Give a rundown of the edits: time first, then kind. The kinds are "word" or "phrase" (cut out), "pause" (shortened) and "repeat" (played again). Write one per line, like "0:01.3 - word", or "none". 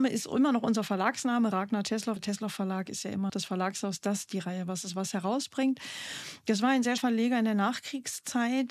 0:02.2 - word
0:03.3 - word
0:07.0 - word

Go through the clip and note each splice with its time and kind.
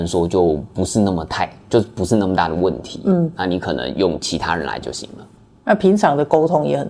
0:04.8 - word

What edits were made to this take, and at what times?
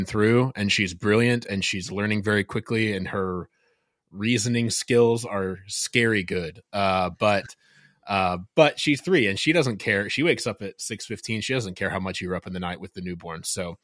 none

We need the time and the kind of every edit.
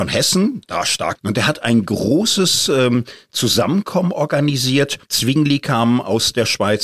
0:01.1 - word
0:05.0 - pause

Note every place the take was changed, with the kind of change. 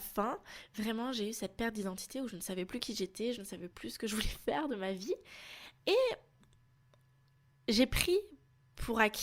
none

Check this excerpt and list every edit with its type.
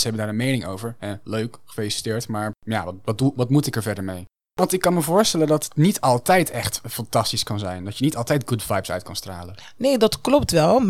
0:02.6 - pause

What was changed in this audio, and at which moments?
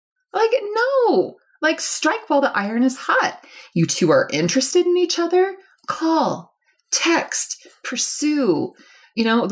none

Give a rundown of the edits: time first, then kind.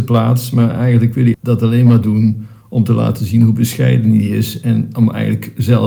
0:01.3 - word

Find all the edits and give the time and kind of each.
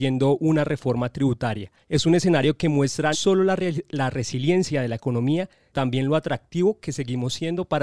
0:01.8 - pause
0:03.1 - word
0:05.7 - word

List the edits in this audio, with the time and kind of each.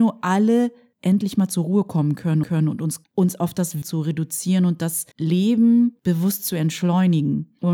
0:02.4 - repeat
0:03.0 - word
0:03.8 - word
0:05.1 - pause

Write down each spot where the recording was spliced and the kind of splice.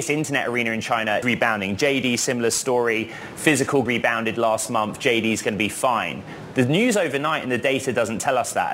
0:01.2 - word
0:03.9 - word

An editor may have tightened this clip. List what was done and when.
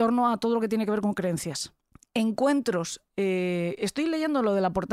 0:01.9 - pause

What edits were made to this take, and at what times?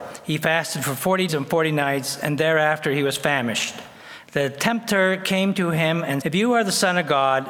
0:01.3 - word
0:06.2 - word

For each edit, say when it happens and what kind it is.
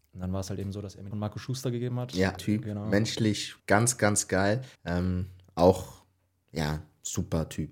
0:01.1 - phrase
0:02.4 - phrase
0:03.6 - pause
0:04.8 - pause

